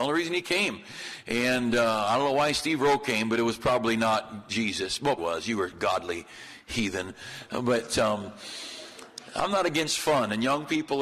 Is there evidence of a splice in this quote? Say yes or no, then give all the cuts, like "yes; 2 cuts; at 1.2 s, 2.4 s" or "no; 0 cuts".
yes; 1 cut; at 5.2 s